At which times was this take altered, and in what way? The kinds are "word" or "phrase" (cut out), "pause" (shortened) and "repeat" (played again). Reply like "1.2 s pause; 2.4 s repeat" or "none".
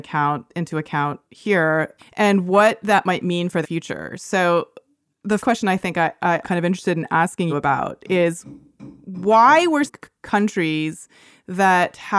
2.0 s word; 3.6 s word; 5.4 s word; 6.4 s word; 7.5 s word; 9.9 s word